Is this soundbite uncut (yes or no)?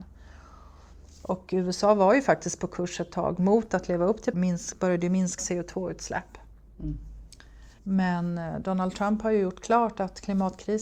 no